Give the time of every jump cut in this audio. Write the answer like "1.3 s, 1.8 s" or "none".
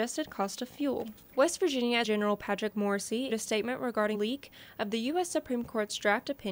2.0 s, 3.3 s, 4.1 s